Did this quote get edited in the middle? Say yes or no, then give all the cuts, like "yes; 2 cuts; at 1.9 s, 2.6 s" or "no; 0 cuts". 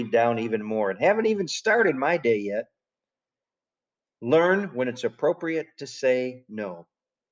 no; 0 cuts